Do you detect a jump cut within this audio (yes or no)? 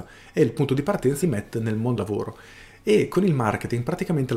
yes